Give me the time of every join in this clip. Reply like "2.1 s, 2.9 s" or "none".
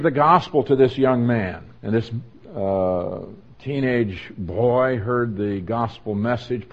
1.8 s